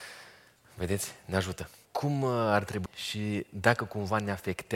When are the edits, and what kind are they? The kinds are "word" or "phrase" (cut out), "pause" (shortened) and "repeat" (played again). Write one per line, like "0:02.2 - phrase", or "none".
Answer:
0:01.9 - pause
0:02.9 - phrase